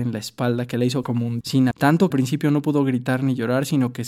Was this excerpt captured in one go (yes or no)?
no